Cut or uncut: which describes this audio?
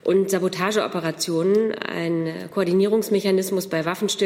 uncut